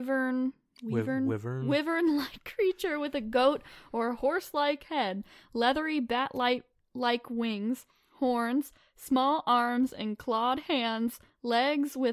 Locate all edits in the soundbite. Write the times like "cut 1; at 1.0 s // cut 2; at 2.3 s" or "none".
none